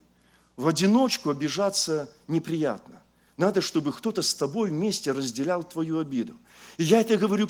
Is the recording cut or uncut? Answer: uncut